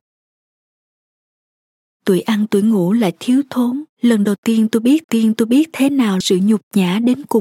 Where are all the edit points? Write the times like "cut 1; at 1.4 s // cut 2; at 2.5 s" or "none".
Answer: cut 1; at 3.9 s // cut 2; at 5.0 s // cut 3; at 6.2 s